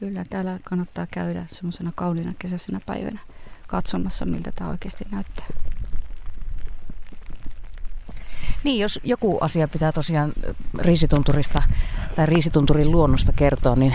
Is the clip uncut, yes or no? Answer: yes